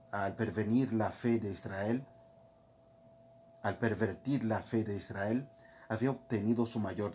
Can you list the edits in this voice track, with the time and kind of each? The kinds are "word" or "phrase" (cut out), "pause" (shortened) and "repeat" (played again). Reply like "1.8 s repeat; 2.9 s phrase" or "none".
none